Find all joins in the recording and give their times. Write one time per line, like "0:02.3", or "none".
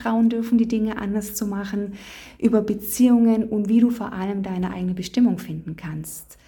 none